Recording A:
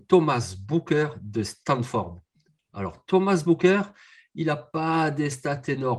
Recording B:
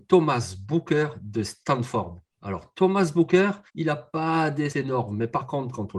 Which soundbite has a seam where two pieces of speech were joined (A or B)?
B